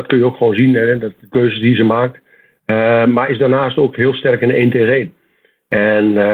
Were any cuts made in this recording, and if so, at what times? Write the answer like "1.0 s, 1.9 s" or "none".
none